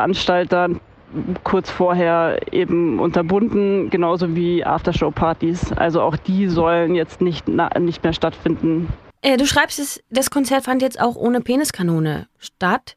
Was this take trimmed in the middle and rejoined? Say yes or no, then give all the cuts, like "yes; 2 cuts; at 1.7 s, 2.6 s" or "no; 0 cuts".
no; 0 cuts